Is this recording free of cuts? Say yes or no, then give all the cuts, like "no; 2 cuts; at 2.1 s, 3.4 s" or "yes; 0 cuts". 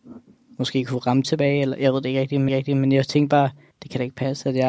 no; 3 cuts; at 1.2 s, 2.5 s, 3.7 s